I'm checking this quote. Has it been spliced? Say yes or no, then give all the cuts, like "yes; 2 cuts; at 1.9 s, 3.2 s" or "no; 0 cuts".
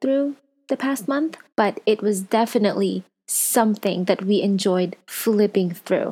yes; 3 cuts; at 1.5 s, 3.1 s, 5.0 s